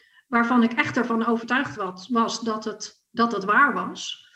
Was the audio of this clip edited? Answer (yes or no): yes